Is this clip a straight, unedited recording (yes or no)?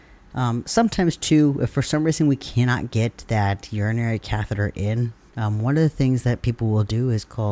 yes